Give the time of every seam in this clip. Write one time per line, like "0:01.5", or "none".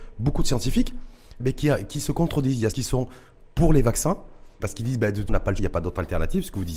0:01.4
0:02.7
0:04.6
0:05.3
0:05.6